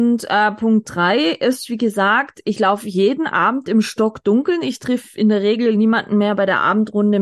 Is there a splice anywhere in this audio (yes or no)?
no